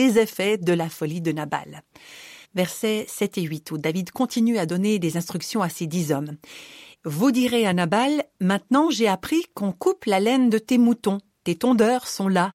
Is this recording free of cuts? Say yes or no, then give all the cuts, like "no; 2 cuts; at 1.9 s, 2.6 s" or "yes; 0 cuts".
yes; 0 cuts